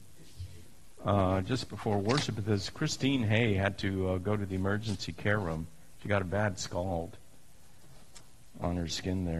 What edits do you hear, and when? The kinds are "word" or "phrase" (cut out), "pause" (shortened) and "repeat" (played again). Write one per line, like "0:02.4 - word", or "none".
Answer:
none